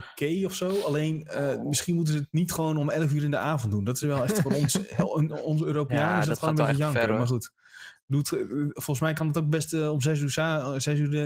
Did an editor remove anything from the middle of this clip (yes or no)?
no